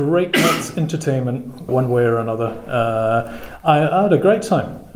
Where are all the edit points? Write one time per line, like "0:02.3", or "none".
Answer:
0:01.7